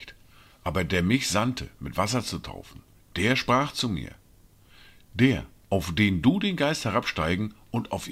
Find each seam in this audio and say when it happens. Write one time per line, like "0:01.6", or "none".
none